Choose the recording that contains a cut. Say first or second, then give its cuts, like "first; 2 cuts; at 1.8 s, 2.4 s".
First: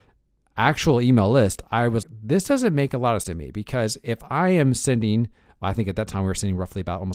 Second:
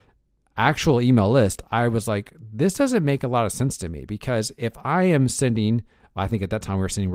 first; 2 cuts; at 2.0 s, 3.2 s